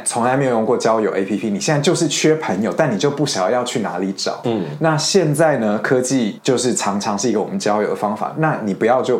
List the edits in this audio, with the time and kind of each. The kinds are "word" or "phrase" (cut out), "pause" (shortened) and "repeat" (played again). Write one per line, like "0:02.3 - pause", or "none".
none